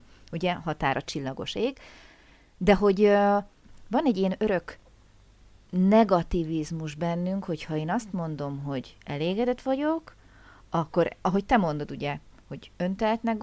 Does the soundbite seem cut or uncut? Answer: uncut